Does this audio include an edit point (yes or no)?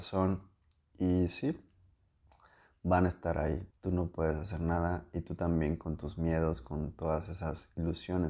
yes